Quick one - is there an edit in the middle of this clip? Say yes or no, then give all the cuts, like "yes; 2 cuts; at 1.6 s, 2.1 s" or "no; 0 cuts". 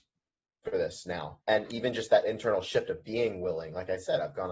yes; 1 cut; at 1.4 s